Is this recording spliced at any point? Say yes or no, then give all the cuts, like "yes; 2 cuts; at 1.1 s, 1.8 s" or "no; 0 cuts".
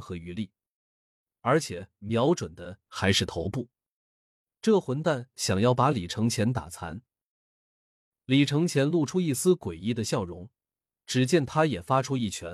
no; 0 cuts